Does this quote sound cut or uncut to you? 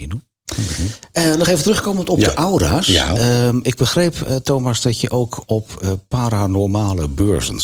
uncut